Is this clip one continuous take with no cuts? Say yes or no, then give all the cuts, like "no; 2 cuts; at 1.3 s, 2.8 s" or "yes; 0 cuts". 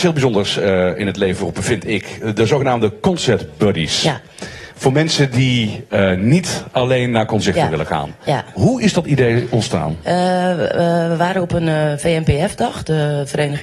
yes; 0 cuts